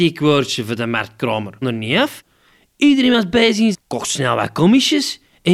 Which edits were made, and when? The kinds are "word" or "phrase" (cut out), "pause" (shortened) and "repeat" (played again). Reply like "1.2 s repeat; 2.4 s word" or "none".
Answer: 1.6 s word; 3.7 s phrase